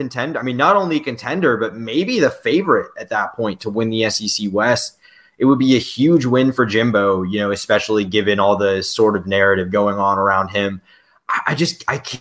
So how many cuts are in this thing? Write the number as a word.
zero